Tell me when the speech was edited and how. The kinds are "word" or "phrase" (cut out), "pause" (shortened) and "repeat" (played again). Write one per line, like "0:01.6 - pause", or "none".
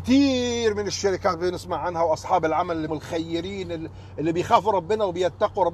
0:02.9 - phrase